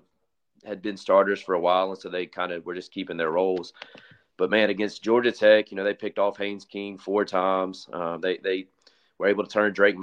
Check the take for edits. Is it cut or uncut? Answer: uncut